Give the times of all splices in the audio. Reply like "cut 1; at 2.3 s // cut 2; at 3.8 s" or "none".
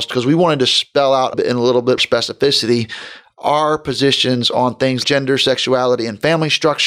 cut 1; at 1.3 s // cut 2; at 2.0 s // cut 3; at 5.0 s